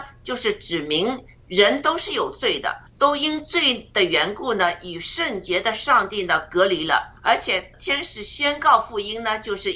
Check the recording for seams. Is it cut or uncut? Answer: cut